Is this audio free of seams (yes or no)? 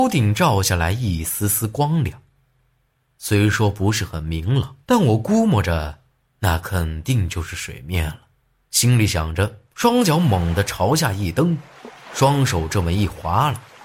no